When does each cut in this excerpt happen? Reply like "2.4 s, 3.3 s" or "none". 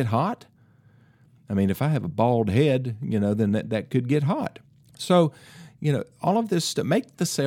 4.7 s